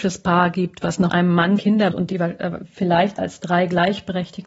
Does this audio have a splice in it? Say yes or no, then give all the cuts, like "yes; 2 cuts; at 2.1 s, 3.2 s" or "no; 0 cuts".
yes; 4 cuts; at 1.1 s, 1.6 s, 1.9 s, 3.2 s